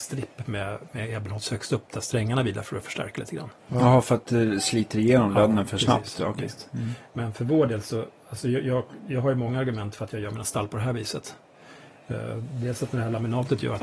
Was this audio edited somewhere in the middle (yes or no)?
no